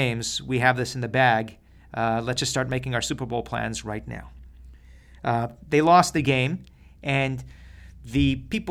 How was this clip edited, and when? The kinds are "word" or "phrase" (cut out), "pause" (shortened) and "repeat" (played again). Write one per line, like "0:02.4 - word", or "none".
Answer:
none